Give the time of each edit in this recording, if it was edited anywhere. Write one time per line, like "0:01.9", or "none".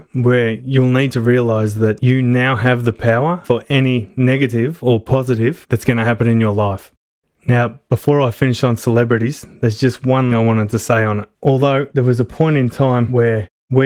0:10.3
0:11.3